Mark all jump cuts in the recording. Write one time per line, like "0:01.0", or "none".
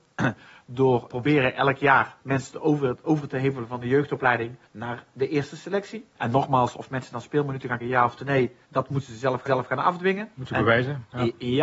0:01.1
0:02.2
0:03.0
0:04.7
0:06.1
0:07.8
0:08.6
0:09.5